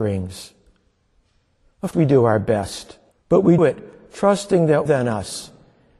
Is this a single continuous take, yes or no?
no